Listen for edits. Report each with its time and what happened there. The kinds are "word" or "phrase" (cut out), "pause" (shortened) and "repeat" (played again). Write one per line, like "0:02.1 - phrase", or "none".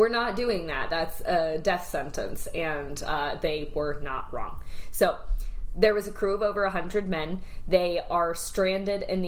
none